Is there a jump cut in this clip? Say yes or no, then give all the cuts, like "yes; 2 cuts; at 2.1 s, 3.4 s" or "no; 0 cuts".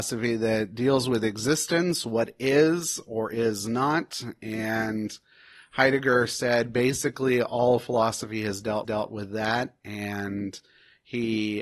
yes; 1 cut; at 8.8 s